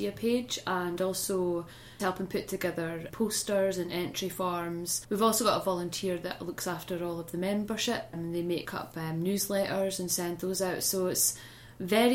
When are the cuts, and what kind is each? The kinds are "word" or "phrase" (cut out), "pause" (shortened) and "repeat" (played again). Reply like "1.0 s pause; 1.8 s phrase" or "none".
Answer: 2.0 s word